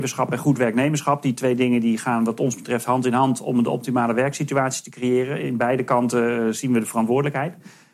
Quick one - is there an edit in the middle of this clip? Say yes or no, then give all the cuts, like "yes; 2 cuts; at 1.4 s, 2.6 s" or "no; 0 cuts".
no; 0 cuts